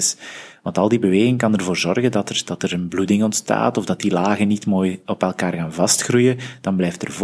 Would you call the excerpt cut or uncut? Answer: uncut